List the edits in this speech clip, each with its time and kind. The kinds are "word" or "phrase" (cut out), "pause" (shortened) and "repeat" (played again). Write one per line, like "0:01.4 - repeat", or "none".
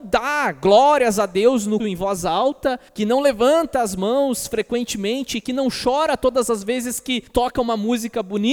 0:01.8 - word
0:02.9 - pause
0:07.3 - pause